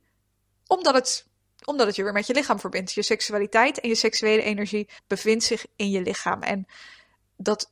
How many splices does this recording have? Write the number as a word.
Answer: one